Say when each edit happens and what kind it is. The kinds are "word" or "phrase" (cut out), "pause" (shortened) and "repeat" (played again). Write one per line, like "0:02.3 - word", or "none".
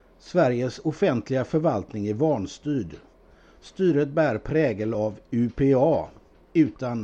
none

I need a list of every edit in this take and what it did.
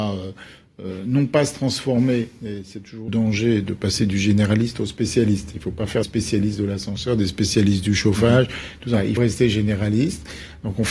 0:03.1 - word
0:06.0 - word
0:09.2 - word

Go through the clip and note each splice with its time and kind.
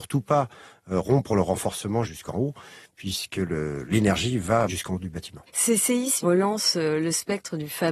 0:02.0 - word
0:04.7 - word
0:06.2 - word

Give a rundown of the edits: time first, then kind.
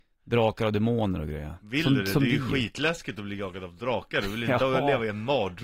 none

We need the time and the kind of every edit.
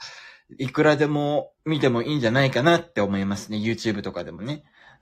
0:01.6 - pause

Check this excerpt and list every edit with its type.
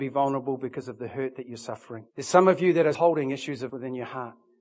0:02.1 - pause
0:02.9 - word
0:03.7 - word

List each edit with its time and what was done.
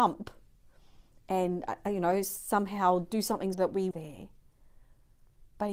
0:03.5 - word
0:03.9 - phrase

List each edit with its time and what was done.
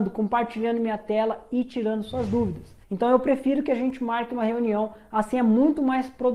0:02.8 - pause

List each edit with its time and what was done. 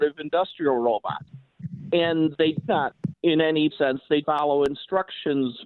0:02.7 - word
0:03.1 - word
0:03.7 - word
0:04.2 - word

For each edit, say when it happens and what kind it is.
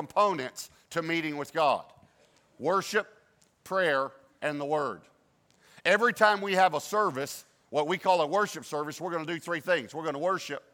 none

